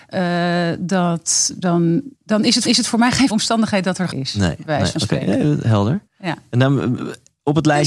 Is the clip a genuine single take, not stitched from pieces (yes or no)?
no